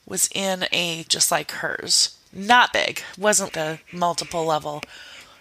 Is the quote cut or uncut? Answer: cut